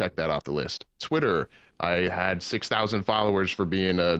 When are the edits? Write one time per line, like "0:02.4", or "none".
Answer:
none